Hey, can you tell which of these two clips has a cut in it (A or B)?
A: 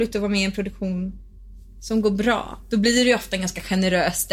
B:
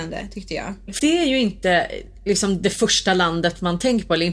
B